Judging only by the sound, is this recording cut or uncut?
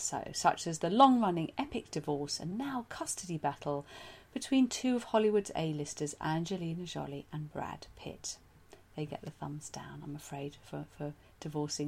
uncut